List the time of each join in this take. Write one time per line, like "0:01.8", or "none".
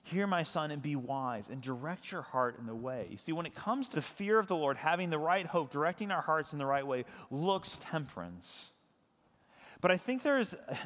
0:03.9
0:07.8